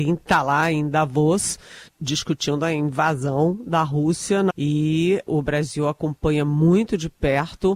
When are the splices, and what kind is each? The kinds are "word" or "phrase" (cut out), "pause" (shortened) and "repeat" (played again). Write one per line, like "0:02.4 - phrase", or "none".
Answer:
0:01.9 - word
0:04.5 - word
0:05.3 - word